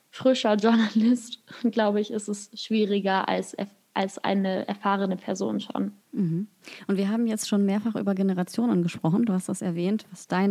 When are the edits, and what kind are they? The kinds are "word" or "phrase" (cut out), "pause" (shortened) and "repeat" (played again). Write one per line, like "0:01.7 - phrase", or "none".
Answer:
0:06.0 - pause